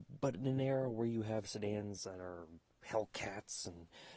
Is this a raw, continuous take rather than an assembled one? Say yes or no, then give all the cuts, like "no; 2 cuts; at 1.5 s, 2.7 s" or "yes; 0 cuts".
yes; 0 cuts